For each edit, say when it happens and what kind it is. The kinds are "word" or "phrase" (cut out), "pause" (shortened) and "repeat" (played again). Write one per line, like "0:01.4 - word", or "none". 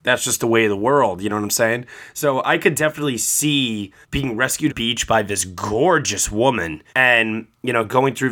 0:04.0 - pause
0:04.7 - phrase
0:06.9 - pause